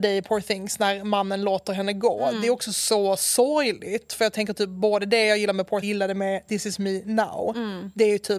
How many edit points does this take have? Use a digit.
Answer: 1